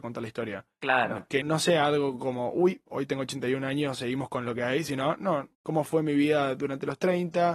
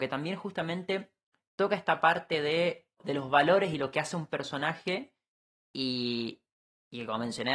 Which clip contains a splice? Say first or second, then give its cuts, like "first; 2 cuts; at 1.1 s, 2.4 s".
first; 2 cuts; at 1.4 s, 5.5 s